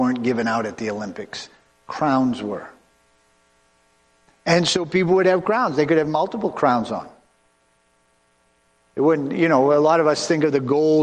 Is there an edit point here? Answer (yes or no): no